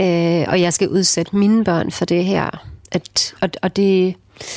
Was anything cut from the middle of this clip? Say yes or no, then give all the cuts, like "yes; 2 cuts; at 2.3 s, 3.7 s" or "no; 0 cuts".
yes; 1 cut; at 2.8 s